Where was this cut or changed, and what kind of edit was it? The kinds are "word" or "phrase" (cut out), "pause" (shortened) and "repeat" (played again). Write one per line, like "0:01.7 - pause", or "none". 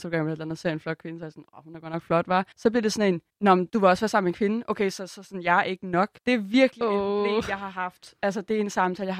0:02.5 - pause
0:03.3 - pause
0:06.2 - pause